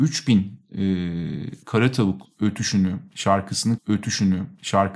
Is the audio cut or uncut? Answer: cut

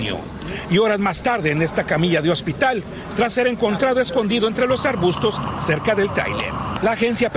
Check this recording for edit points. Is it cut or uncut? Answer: uncut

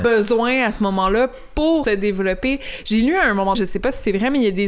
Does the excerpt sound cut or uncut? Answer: cut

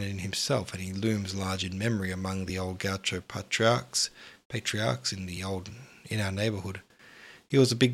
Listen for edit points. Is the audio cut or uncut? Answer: uncut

